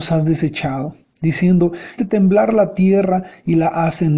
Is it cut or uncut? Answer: cut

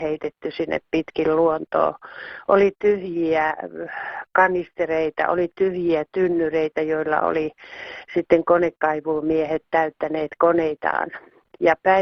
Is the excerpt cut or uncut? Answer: uncut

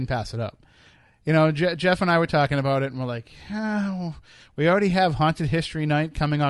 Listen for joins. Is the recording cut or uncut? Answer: uncut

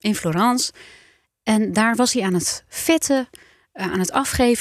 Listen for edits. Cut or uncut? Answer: uncut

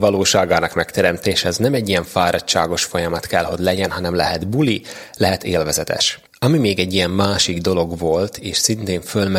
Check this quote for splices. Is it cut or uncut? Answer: cut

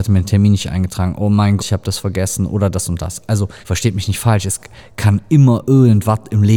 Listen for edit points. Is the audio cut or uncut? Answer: cut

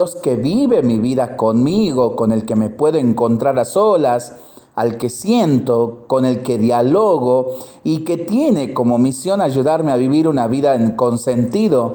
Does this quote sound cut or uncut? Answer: uncut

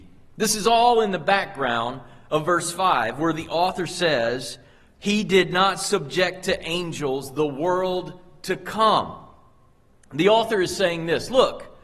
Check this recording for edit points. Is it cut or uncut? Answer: uncut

